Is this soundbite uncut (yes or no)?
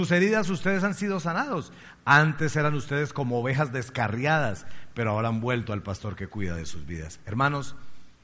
yes